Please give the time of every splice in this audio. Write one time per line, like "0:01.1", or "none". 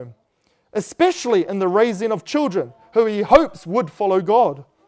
none